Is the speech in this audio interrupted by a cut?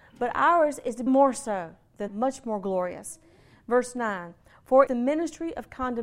yes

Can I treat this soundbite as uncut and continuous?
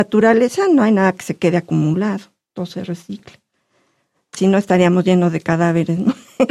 yes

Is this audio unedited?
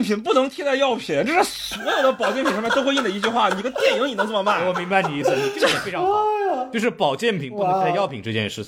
yes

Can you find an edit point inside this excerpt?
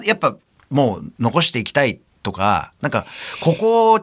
yes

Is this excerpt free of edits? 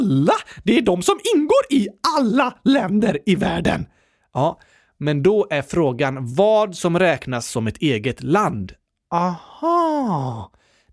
yes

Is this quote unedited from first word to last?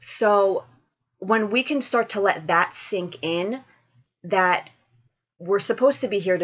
yes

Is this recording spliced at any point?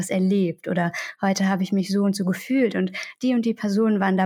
no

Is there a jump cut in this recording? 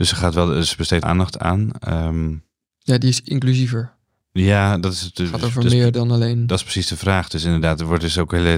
yes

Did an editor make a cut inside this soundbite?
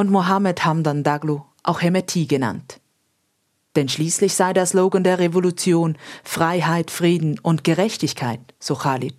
no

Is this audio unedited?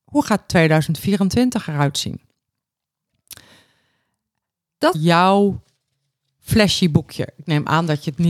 no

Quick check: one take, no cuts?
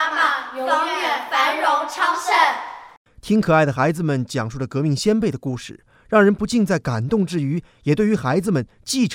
yes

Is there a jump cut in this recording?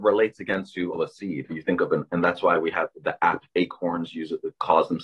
yes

